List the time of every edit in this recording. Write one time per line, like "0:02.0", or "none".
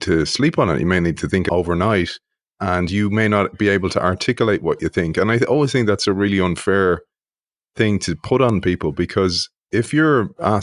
none